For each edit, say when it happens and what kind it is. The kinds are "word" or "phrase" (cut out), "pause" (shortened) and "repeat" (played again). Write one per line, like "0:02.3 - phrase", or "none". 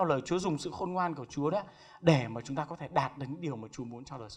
none